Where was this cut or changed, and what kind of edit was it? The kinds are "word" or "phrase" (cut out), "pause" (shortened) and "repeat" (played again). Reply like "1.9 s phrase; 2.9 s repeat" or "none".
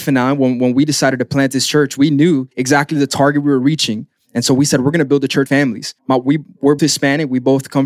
2.5 s pause; 5.5 s word; 6.0 s pause; 6.8 s word